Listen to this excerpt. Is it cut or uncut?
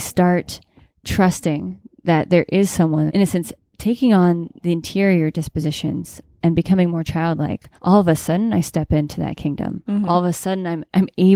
cut